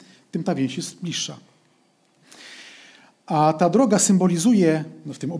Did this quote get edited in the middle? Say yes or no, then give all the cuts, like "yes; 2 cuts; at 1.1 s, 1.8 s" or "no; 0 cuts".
no; 0 cuts